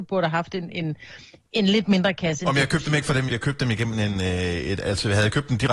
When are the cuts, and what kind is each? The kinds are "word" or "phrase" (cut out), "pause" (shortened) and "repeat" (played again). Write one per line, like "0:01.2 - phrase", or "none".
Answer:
0:03.3 - word